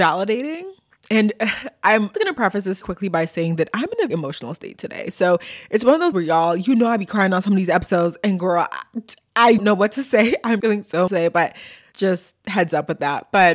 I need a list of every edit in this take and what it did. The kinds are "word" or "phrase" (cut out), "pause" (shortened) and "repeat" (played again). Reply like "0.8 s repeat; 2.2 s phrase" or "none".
2.1 s word; 2.8 s word; 4.1 s word; 6.1 s word; 9.6 s word; 10.6 s word; 11.1 s word; 11.9 s word